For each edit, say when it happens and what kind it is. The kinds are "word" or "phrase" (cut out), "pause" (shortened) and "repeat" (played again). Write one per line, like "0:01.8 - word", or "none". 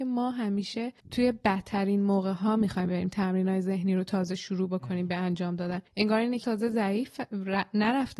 0:01.0 - pause
0:05.9 - pause
0:06.4 - word